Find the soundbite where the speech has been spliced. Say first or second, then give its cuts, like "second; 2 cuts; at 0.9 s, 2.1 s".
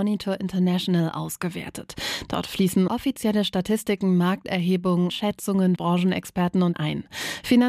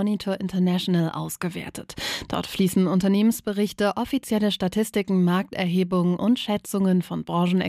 first; 4 cuts; at 2.9 s, 5.1 s, 5.8 s, 6.7 s